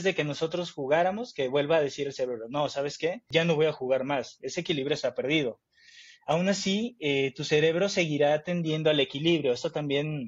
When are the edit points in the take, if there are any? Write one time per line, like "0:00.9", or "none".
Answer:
none